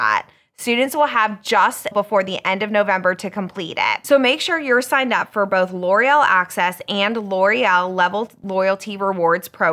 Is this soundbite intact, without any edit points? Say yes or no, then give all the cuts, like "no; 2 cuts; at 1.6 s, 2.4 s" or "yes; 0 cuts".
no; 1 cut; at 1.9 s